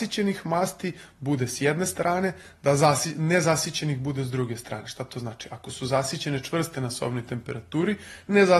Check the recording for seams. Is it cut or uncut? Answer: uncut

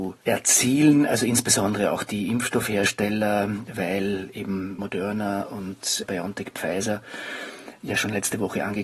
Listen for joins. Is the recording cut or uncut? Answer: uncut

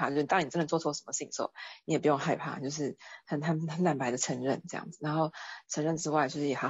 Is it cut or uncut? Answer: uncut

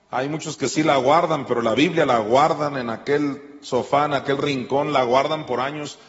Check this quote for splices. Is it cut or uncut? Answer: uncut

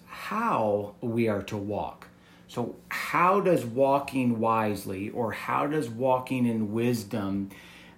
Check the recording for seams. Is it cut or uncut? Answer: uncut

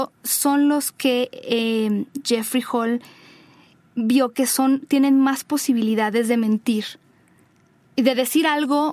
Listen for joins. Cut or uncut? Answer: uncut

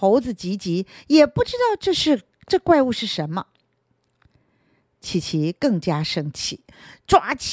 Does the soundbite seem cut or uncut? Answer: uncut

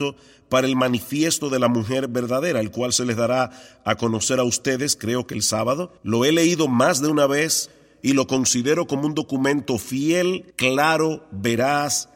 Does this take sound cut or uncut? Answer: cut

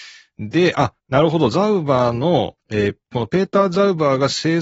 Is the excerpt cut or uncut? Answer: cut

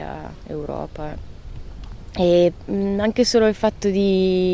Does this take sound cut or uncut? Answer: uncut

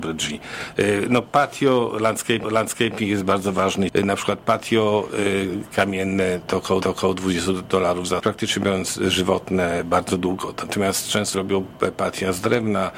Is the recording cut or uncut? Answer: cut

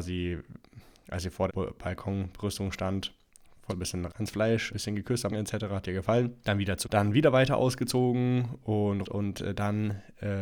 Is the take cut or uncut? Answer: cut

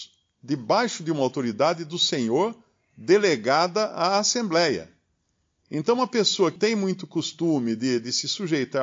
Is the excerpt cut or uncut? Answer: cut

